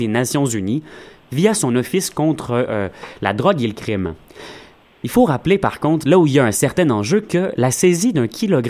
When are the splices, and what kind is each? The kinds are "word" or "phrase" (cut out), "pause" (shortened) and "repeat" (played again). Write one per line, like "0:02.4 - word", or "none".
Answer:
none